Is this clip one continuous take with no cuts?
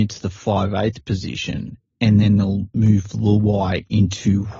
yes; 0 cuts

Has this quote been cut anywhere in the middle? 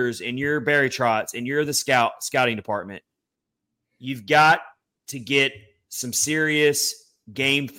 no; 0 cuts

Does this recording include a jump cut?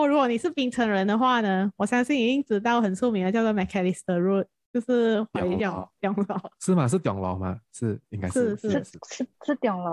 no; 0 cuts

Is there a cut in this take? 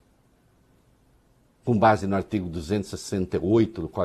no; 0 cuts

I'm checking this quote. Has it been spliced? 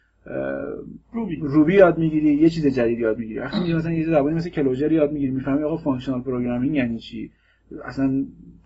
yes; 1 cut; at 1.0 s

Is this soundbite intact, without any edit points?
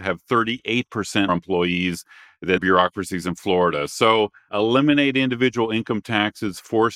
no; 3 cuts; at 1.3 s, 2.6 s, 4.5 s

